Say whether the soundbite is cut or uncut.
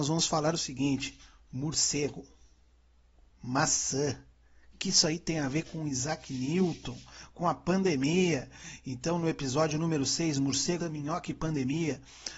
cut